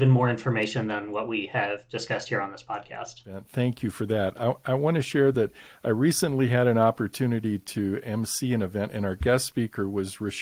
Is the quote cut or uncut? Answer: uncut